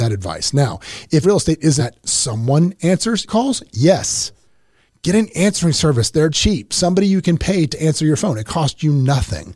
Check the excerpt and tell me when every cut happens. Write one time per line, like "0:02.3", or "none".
0:01.2
0:01.8
0:03.3
0:06.3